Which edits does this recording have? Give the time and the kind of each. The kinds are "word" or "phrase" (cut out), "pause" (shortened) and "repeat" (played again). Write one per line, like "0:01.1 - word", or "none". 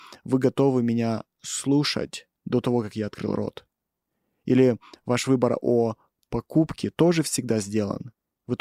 none